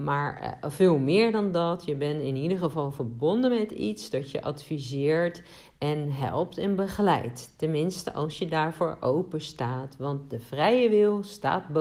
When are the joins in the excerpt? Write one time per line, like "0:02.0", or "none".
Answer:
none